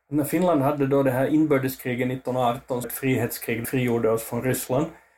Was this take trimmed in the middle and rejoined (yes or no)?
yes